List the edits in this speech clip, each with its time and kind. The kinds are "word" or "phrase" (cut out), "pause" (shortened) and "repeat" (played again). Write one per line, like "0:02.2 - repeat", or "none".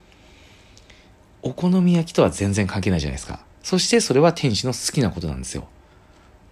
0:03.5 - pause